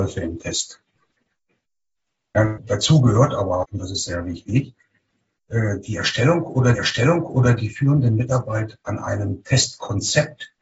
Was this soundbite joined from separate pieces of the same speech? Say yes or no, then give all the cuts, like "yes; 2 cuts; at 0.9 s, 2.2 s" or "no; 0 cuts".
yes; 2 cuts; at 3.6 s, 6.7 s